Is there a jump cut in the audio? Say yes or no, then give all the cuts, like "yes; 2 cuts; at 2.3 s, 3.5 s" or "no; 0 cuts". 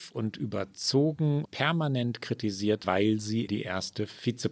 yes; 3 cuts; at 1.4 s, 2.8 s, 3.5 s